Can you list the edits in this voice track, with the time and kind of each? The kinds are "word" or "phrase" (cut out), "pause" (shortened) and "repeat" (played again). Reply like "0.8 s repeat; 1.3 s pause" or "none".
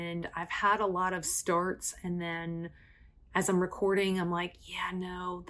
none